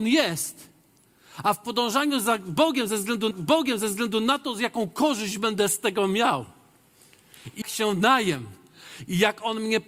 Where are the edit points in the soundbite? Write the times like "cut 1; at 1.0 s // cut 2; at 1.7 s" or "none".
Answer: cut 1; at 3.3 s // cut 2; at 7.6 s